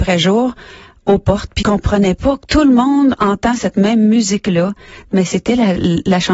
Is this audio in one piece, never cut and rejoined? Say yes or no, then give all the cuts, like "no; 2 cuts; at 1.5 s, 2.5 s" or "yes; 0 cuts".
no; 1 cut; at 1.6 s